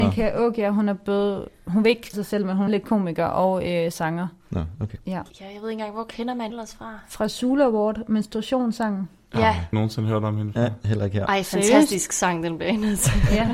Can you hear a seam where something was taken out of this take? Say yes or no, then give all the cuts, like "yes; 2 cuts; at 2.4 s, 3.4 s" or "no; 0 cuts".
yes; 5 cuts; at 2.1 s, 2.7 s, 5.3 s, 6.5 s, 9.7 s